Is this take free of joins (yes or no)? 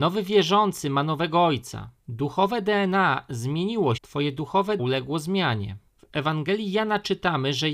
no